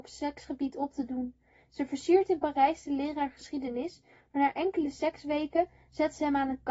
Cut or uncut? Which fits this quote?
uncut